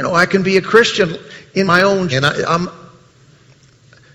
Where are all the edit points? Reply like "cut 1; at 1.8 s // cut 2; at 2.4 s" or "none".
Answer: cut 1; at 1.7 s // cut 2; at 2.1 s

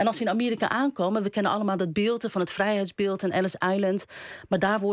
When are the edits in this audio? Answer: none

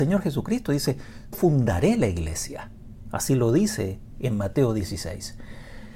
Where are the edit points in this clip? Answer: cut 1; at 1.3 s

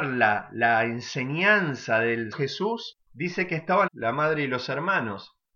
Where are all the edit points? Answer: cut 1; at 2.3 s // cut 2; at 3.1 s // cut 3; at 3.9 s

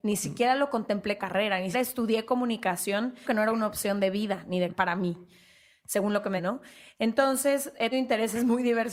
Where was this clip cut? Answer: cut 1; at 1.2 s // cut 2; at 1.7 s // cut 3; at 3.2 s // cut 4; at 4.7 s // cut 5; at 6.4 s // cut 6; at 7.9 s

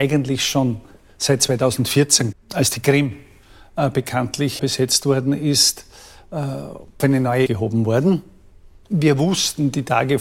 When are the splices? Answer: cut 1; at 2.3 s // cut 2; at 4.6 s // cut 3; at 7.0 s // cut 4; at 7.5 s

